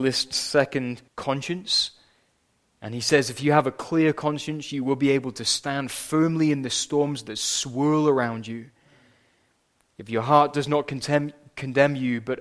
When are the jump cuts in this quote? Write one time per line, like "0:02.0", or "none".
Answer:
0:01.1